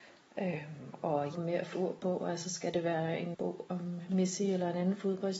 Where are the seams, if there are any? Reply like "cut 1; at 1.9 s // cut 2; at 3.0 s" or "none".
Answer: cut 1; at 1.3 s // cut 2; at 1.7 s // cut 3; at 3.3 s